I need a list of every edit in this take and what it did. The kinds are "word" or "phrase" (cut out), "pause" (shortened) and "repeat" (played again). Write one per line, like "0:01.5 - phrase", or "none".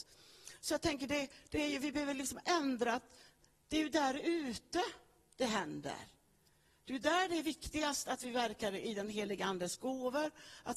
none

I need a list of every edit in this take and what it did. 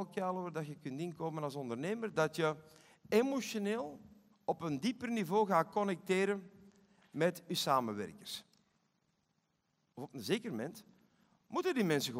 0:04.3 - pause

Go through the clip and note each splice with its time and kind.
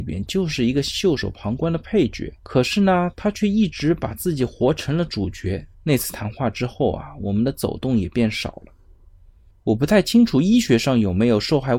0:02.4 - pause
0:05.7 - pause

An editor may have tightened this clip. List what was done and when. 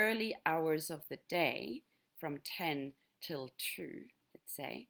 none

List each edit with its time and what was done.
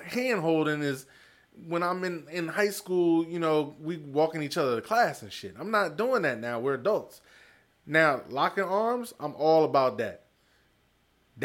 none

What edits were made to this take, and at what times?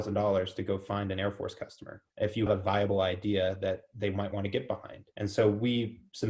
0:02.1 - pause
0:02.5 - word
0:05.1 - pause

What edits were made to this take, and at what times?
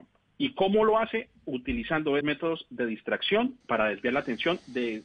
0:02.2 - word
0:03.6 - pause

